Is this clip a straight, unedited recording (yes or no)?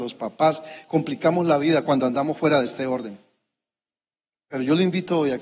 yes